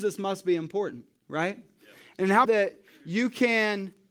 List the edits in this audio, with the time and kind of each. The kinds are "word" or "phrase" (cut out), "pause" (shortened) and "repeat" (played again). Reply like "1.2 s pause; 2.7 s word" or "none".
2.4 s phrase